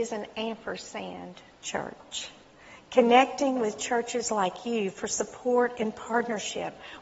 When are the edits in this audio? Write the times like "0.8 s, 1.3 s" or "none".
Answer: none